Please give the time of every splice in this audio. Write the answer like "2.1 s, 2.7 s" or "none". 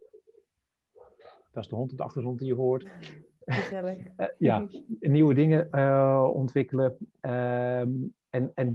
none